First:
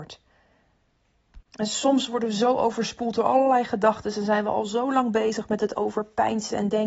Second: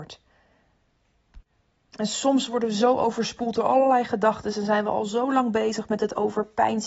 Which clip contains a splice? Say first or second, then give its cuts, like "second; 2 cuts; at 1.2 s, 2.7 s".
first; 1 cut; at 1.5 s